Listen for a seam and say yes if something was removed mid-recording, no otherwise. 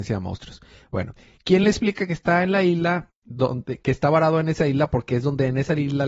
no